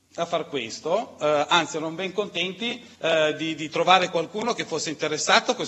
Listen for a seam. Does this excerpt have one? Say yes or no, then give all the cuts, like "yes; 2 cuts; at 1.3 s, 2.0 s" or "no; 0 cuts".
yes; 1 cut; at 2.9 s